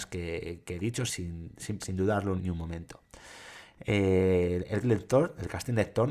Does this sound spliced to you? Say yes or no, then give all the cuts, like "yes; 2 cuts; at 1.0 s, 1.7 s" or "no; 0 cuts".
yes; 4 cuts; at 1.1 s, 1.8 s, 2.4 s, 4.8 s